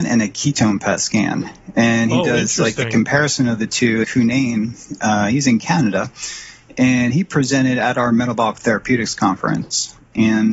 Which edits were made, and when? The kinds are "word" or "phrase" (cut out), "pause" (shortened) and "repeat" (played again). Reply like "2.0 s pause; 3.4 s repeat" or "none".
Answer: 4.0 s phrase